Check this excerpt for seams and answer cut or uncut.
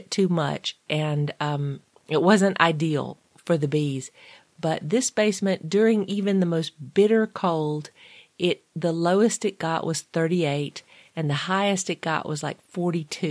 uncut